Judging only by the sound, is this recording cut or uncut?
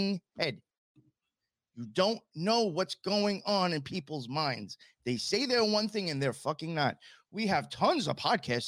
uncut